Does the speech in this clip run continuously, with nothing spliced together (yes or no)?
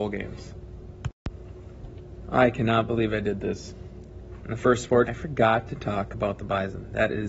no